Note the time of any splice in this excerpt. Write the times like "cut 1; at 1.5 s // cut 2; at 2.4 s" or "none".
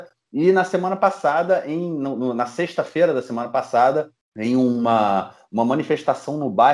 none